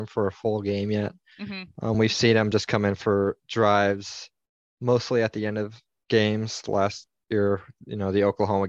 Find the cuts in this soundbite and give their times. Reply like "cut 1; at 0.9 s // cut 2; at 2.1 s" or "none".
none